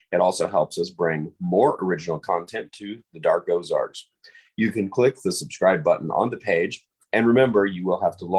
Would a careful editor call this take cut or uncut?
uncut